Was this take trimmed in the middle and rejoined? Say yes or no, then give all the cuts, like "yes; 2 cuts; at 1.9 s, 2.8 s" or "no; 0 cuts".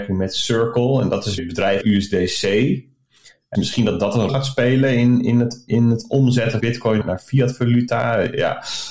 yes; 7 cuts; at 1.4 s, 1.8 s, 3.5 s, 4.3 s, 5.7 s, 6.6 s, 7.0 s